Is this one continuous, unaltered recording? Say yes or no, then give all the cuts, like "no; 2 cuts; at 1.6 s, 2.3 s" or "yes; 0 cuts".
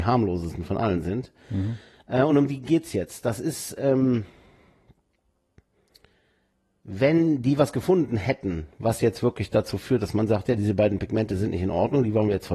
yes; 0 cuts